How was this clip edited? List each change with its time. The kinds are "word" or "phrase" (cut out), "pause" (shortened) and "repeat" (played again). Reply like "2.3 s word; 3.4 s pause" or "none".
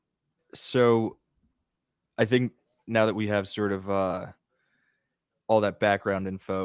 none